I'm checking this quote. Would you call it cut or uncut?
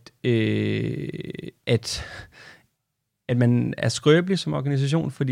uncut